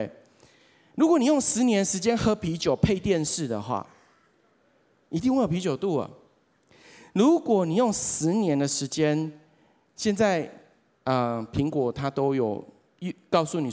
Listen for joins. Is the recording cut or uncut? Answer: uncut